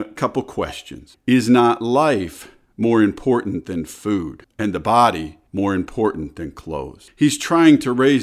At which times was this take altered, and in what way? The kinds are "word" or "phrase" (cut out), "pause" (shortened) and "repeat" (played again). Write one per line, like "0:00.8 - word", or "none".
none